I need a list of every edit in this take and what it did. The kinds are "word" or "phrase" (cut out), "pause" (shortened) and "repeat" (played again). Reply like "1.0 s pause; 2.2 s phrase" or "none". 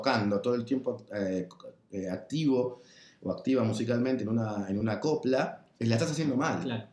none

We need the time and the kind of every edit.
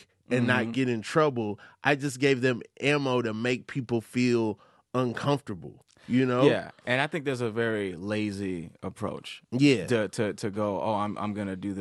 9.4 s pause

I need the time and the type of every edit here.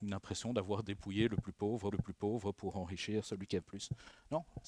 1.9 s repeat; 3.6 s word

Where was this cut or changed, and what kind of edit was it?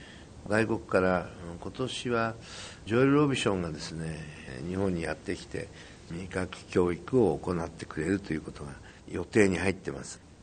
9.0 s pause

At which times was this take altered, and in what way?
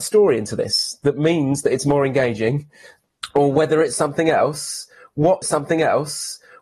5.4 s repeat

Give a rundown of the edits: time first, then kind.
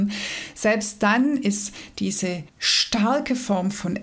2.5 s pause

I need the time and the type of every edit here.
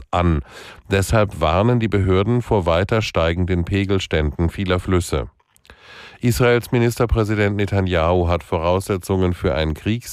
none

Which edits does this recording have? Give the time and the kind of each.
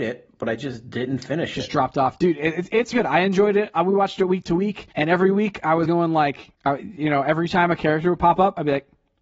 2.9 s word; 4.9 s pause; 5.9 s word; 6.5 s pause

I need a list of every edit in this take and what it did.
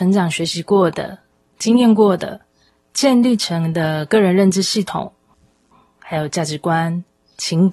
none

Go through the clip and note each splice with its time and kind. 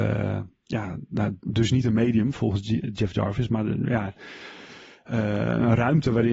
none

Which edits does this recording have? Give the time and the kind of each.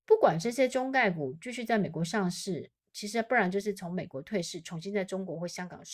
none

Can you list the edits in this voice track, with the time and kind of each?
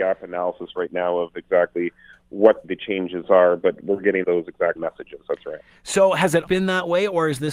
2.6 s word; 4.2 s word; 4.8 s word; 6.5 s word

